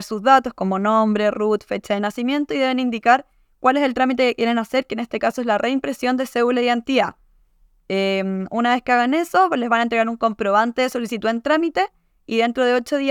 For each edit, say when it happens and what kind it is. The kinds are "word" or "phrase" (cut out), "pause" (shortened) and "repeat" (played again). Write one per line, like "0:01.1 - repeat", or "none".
none